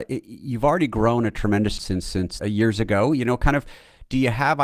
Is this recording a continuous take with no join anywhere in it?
no; 2 cuts; at 1.8 s, 2.4 s

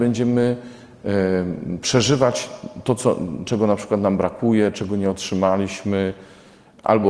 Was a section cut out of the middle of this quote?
no; 0 cuts

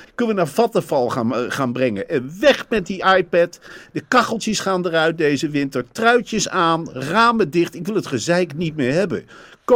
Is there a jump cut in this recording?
no; 0 cuts

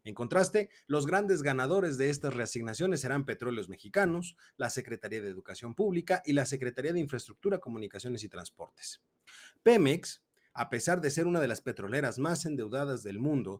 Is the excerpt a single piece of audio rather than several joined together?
yes; 0 cuts

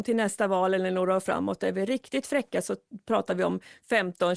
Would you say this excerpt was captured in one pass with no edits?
yes; 0 cuts

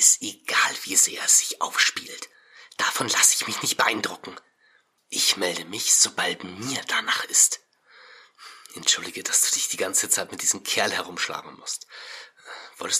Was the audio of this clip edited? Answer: no; 0 cuts

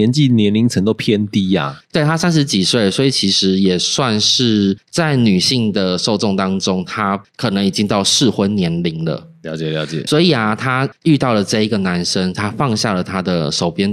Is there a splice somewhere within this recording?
yes; 1 cut; at 10.1 s

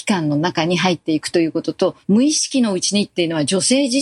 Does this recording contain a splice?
yes; 1 cut; at 2.0 s

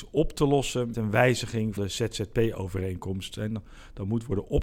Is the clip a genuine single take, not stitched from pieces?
no; 2 cuts; at 0.9 s, 1.8 s

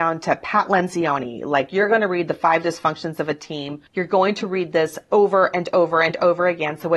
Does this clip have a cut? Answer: yes; 1 cut; at 3.9 s

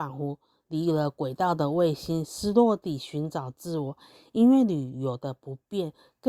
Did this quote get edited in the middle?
no; 0 cuts

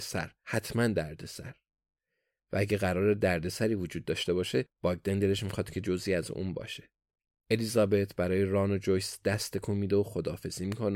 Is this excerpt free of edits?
yes; 0 cuts

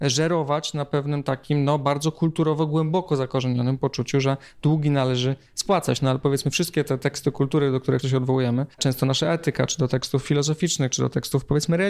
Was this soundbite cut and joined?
yes; 2 cuts; at 8.0 s, 8.7 s

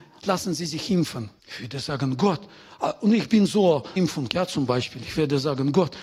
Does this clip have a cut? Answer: yes; 2 cuts; at 1.4 s, 4.0 s

